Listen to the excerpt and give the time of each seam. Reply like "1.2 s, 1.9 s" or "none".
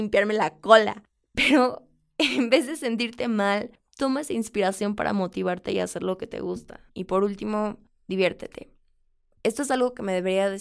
6.9 s